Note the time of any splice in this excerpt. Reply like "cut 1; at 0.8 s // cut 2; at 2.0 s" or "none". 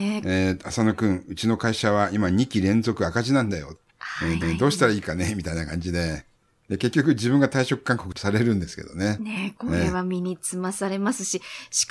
cut 1; at 3.9 s // cut 2; at 4.4 s